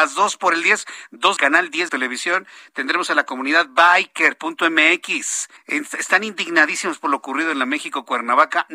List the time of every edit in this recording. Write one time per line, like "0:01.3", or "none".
0:01.4
0:01.9
0:05.6

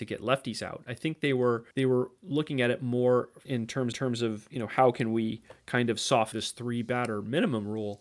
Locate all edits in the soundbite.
0:01.7
0:03.5
0:03.9
0:06.3

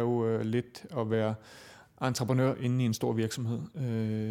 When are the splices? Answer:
none

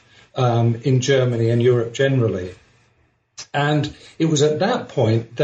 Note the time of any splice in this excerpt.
none

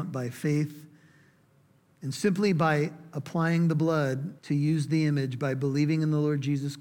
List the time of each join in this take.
0:04.4

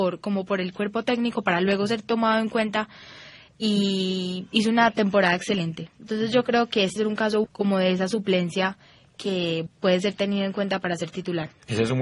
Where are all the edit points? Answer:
0:07.0
0:07.4
0:09.7

